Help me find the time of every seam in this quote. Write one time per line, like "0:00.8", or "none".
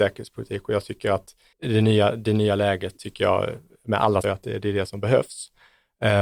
0:01.5
0:04.2